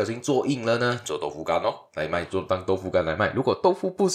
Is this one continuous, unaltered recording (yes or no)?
yes